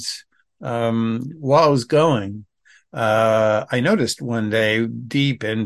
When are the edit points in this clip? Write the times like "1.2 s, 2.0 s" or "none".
none